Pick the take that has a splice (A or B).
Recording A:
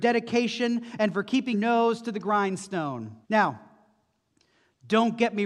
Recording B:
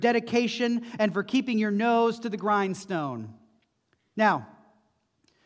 A